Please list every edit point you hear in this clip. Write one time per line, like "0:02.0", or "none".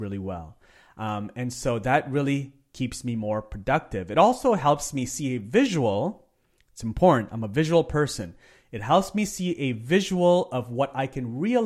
none

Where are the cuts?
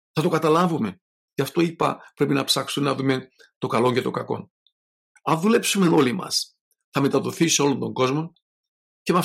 none

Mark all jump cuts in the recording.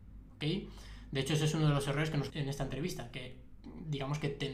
0:02.3

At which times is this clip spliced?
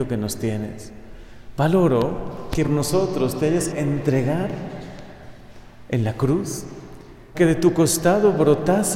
0:02.6
0:03.7
0:07.3

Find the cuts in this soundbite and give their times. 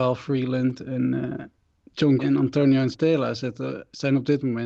0:02.2
0:02.9

